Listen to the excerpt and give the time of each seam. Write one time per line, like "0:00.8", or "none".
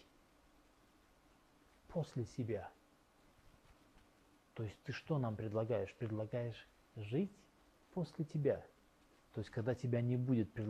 none